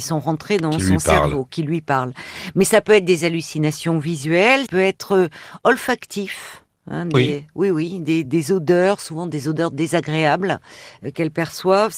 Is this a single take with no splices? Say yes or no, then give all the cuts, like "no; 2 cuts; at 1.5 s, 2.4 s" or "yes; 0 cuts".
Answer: no; 3 cuts; at 4.7 s, 7.1 s, 8.2 s